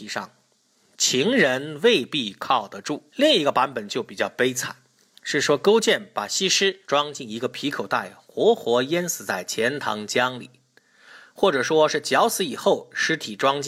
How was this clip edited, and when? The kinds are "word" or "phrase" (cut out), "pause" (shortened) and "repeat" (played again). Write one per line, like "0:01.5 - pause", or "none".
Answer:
0:03.1 - pause
0:06.8 - pause

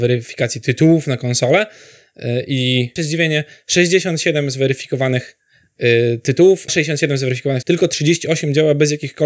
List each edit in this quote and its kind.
0:03.0 - word
0:06.7 - word
0:07.6 - word

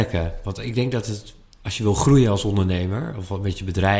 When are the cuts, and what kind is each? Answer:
none

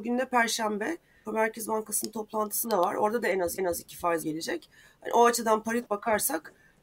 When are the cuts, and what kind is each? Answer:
0:01.2 - phrase
0:03.6 - repeat
0:04.2 - word
0:05.8 - word

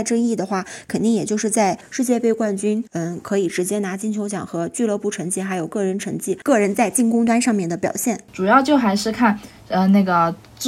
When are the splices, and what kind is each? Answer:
0:02.9 - pause

